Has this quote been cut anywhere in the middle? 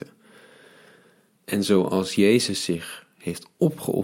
no; 0 cuts

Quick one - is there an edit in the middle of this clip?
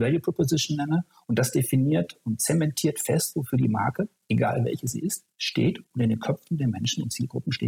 no; 0 cuts

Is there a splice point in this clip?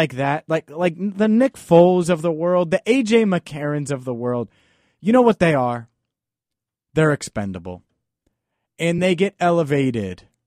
no; 0 cuts

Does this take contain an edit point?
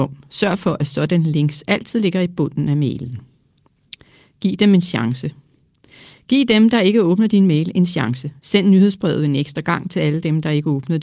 no; 0 cuts

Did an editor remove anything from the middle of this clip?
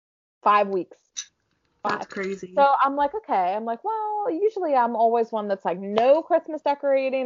no; 0 cuts

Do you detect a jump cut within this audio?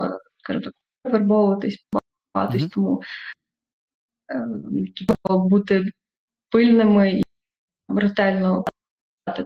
no; 0 cuts

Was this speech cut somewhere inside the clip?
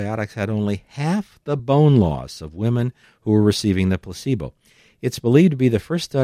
no; 0 cuts

